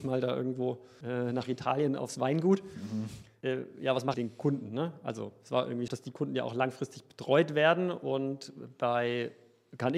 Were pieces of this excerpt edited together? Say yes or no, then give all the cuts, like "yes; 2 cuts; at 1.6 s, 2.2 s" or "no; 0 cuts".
yes; 2 cuts; at 4.1 s, 5.9 s